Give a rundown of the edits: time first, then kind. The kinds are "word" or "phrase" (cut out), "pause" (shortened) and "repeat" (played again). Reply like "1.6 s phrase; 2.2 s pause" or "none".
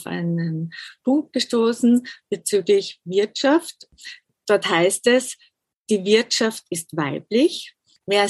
none